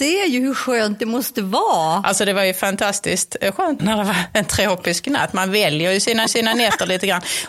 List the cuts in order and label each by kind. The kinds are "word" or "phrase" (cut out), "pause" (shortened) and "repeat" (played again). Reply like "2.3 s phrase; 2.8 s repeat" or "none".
3.8 s phrase; 6.3 s repeat